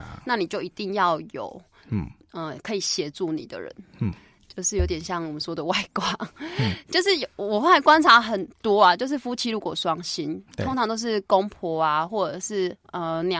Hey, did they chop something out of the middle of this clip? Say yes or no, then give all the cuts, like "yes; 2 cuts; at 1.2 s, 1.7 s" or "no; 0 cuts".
no; 0 cuts